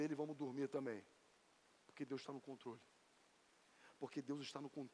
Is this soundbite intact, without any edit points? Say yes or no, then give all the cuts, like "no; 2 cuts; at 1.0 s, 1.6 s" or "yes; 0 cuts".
yes; 0 cuts